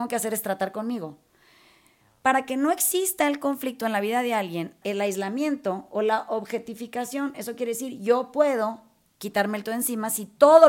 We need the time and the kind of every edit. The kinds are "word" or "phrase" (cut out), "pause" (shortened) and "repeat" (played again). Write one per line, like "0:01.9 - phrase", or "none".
0:04.8 - word
0:09.6 - word